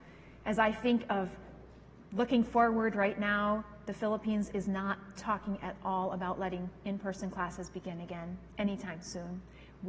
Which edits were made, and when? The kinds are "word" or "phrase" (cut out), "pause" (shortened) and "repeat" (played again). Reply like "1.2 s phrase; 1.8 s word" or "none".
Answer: none